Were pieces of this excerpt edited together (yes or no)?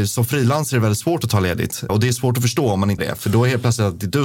yes